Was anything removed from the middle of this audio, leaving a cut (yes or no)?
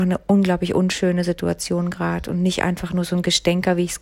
no